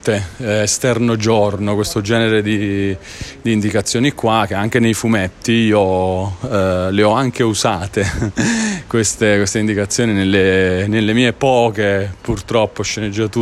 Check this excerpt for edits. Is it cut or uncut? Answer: uncut